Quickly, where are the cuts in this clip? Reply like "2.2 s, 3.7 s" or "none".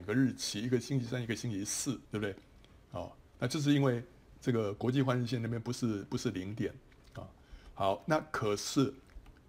2.1 s